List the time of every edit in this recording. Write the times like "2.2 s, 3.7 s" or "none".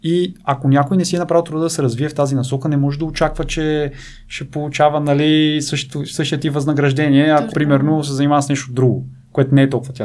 7.5 s